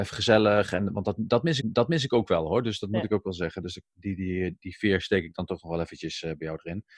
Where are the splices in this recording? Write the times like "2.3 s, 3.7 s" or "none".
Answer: 1.6 s

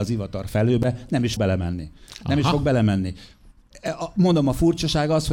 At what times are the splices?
1.4 s

